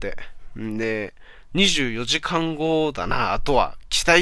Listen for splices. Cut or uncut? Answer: uncut